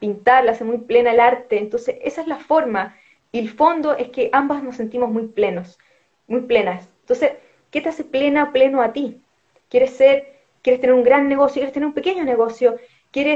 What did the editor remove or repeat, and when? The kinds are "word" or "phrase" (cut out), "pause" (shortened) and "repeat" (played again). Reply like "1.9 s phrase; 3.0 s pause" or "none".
none